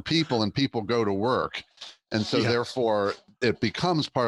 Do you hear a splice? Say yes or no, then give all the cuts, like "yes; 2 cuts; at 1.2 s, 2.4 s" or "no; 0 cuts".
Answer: no; 0 cuts